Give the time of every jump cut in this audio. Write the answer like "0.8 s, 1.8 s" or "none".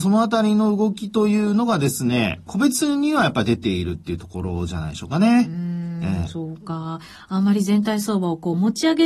2.5 s